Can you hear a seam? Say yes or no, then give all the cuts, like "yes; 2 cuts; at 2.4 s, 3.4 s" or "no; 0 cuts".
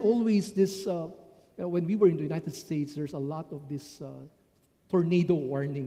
no; 0 cuts